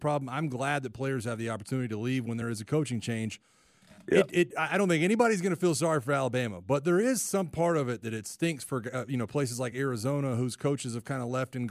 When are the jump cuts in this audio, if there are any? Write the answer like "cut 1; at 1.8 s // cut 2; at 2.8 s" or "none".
none